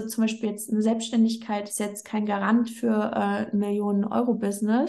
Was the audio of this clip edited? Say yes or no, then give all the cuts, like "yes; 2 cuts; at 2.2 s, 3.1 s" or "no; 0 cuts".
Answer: no; 0 cuts